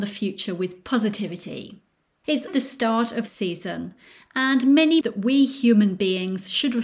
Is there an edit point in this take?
yes; 3 cuts; at 2.5 s, 3.3 s, 5.0 s

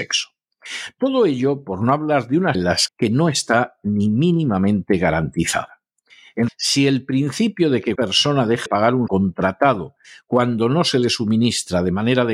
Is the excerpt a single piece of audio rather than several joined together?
no; 6 cuts; at 2.5 s, 2.9 s, 6.5 s, 8.0 s, 8.7 s, 9.1 s

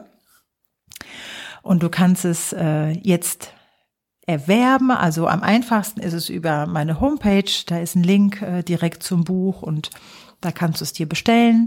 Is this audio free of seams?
yes; 0 cuts

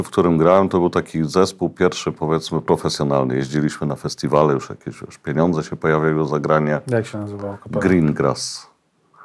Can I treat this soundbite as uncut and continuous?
yes; 0 cuts

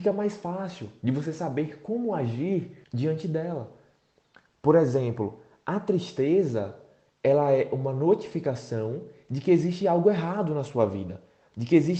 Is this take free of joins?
no; 1 cut; at 2.8 s

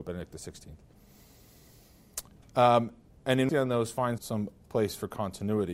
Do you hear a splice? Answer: yes; 2 cuts; at 3.5 s, 4.2 s

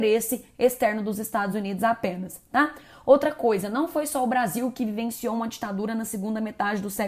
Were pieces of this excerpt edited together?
no; 0 cuts

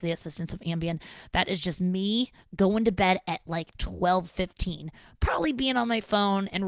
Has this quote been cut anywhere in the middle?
no; 0 cuts

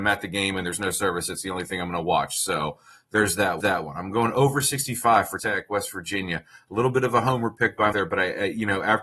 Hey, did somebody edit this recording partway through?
yes; 3 cuts; at 3.6 s, 5.4 s, 7.9 s

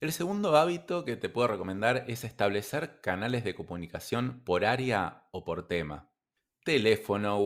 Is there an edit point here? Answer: no; 0 cuts

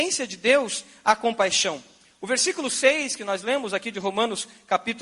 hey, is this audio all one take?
yes; 0 cuts

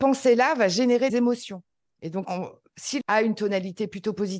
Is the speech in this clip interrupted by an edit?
yes; 3 cuts; at 1.1 s, 2.2 s, 3.0 s

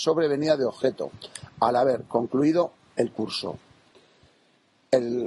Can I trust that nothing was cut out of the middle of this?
yes; 0 cuts

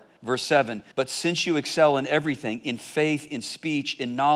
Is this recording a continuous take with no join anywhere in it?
no; 1 cut; at 0.9 s

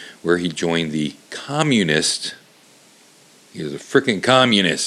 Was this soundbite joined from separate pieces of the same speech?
no; 0 cuts

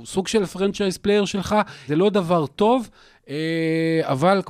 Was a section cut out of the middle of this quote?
yes; 1 cut; at 1.9 s

